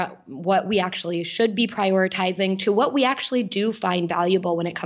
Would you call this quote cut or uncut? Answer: uncut